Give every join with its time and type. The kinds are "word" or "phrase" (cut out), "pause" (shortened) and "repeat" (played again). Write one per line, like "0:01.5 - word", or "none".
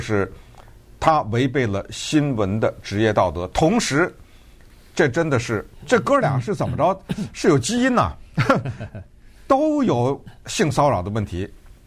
none